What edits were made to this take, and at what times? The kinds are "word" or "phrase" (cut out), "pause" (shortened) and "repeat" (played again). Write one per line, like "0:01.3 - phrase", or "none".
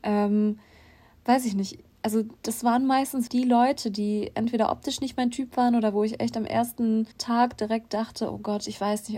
0:03.3 - word
0:07.1 - pause